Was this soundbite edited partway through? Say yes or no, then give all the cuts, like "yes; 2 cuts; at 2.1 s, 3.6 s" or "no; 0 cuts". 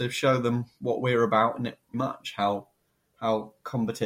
yes; 1 cut; at 1.9 s